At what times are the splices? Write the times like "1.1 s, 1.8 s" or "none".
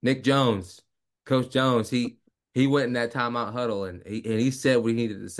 2.3 s